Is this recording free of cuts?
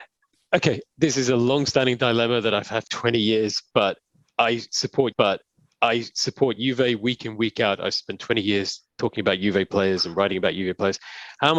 no; 3 cuts; at 2.9 s, 5.1 s, 8.9 s

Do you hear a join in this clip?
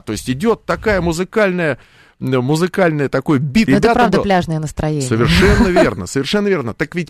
yes; 1 cut; at 3.7 s

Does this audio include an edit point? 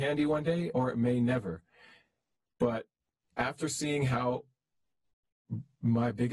no; 0 cuts

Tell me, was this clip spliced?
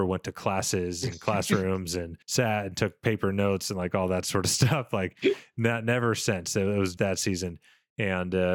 yes; 2 cuts; at 2.2 s, 7.0 s

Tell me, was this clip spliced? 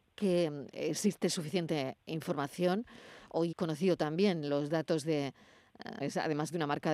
yes; 2 cuts; at 3.5 s, 6.0 s

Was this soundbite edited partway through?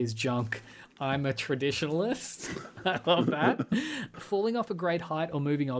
no; 0 cuts

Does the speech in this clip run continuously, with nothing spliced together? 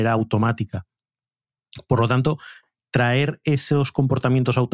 yes; 0 cuts

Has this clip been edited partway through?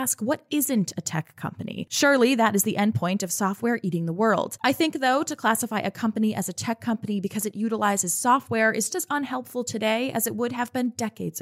yes; 1 cut; at 8.9 s

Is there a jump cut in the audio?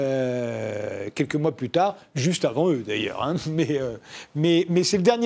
no; 0 cuts

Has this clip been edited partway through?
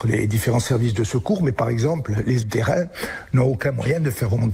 yes; 1 cut; at 2.4 s

